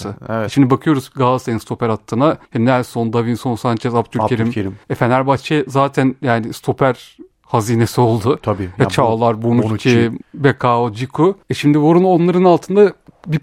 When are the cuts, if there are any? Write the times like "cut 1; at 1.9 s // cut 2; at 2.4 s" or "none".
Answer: cut 1; at 2.4 s // cut 2; at 4.8 s // cut 3; at 10.2 s // cut 4; at 11.4 s